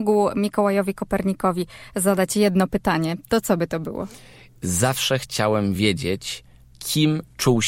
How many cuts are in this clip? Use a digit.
0